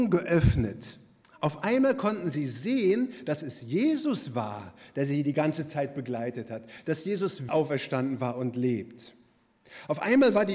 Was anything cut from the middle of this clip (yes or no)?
yes